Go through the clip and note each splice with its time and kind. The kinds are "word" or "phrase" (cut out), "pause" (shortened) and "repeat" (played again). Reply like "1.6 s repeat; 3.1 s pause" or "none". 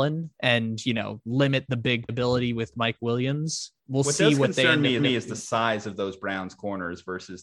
2.1 s word; 5.0 s repeat